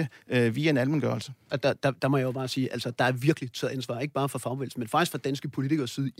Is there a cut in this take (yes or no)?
no